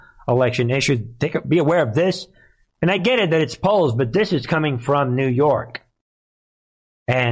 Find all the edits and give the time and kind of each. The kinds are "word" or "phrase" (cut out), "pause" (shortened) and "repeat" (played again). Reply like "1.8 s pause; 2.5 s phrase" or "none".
none